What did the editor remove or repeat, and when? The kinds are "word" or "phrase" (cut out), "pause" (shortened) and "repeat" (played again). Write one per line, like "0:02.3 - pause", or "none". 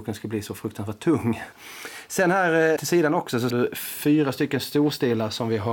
0:02.8 - word
0:03.5 - word